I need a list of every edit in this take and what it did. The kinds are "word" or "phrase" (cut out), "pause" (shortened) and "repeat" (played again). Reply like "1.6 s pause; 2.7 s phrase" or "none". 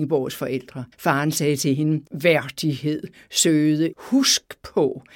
0.9 s pause; 2.1 s pause; 3.9 s word